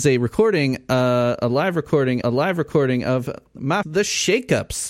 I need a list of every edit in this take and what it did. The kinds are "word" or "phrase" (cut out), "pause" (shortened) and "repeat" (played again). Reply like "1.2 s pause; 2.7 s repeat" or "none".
2.2 s repeat; 3.8 s word